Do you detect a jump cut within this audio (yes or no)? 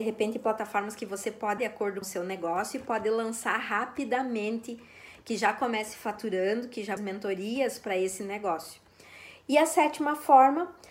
yes